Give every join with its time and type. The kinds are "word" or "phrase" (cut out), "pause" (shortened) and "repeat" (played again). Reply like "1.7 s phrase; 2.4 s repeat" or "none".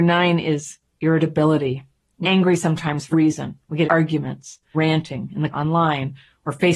2.2 s word; 3.1 s word; 3.9 s word; 4.7 s word; 5.5 s word